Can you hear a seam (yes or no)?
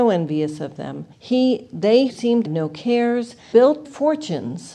yes